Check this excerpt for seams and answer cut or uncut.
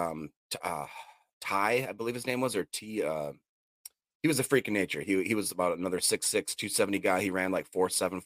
uncut